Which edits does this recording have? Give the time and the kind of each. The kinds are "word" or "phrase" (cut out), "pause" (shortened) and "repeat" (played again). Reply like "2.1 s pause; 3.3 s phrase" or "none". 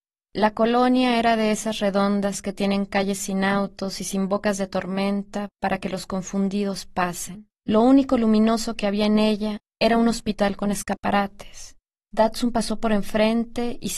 7.6 s pause; 12.0 s pause